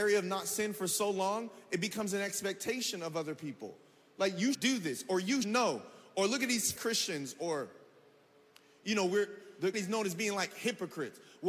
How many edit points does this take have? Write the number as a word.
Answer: four